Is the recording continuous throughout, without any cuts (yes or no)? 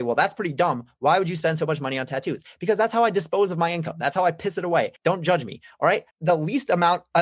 no